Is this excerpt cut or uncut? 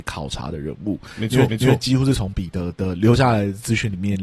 cut